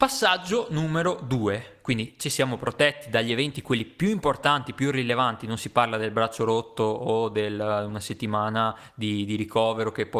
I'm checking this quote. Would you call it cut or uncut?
uncut